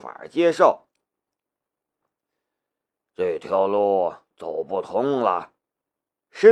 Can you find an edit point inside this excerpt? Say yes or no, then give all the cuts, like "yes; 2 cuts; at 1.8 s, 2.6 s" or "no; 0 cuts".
no; 0 cuts